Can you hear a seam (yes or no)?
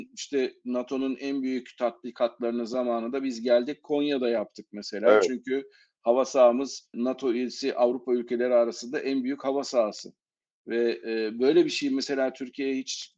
no